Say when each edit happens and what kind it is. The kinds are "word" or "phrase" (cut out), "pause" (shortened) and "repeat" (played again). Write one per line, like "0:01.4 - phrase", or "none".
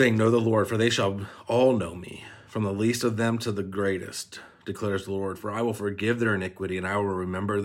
0:02.4 - pause